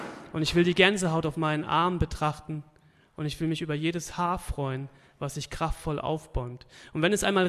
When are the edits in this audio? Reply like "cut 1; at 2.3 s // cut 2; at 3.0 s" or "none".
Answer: none